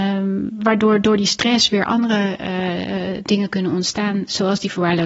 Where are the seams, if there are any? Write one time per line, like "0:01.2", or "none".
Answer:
none